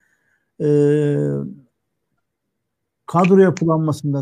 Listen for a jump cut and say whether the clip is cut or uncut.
uncut